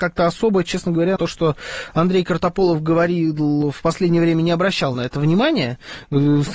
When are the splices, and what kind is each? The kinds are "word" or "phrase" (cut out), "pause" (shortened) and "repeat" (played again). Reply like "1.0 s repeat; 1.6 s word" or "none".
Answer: 1.2 s word